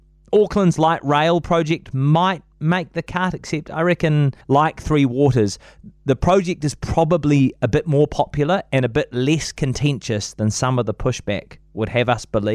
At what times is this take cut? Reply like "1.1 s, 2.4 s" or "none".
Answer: 4.4 s